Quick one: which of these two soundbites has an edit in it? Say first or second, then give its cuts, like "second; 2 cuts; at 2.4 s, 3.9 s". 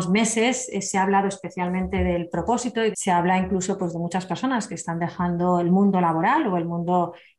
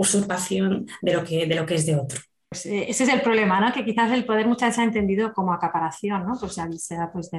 first; 1 cut; at 2.9 s